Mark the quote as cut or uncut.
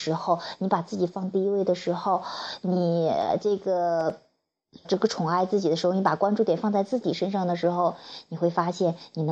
cut